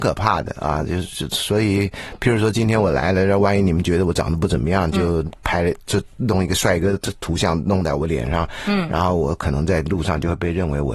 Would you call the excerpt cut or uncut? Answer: uncut